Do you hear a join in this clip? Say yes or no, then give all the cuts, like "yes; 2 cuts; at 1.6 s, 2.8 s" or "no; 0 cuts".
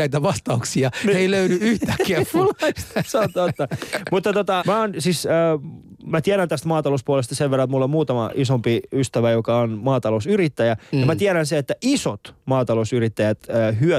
yes; 1 cut; at 4.6 s